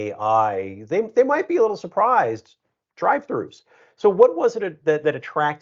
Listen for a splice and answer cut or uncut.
uncut